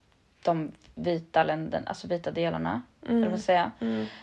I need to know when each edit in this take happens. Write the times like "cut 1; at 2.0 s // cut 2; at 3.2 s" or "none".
none